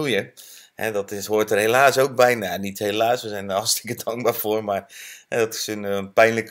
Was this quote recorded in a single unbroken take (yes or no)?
yes